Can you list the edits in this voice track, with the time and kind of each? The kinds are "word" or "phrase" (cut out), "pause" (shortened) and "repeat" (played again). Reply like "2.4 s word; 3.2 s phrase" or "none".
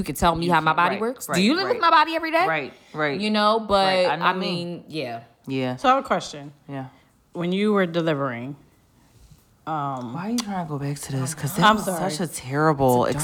none